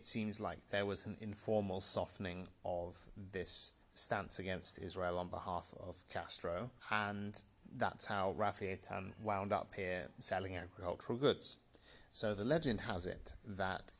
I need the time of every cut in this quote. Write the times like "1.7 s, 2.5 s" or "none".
3.8 s, 6.8 s